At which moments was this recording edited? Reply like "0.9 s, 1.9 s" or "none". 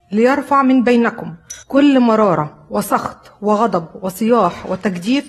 1.6 s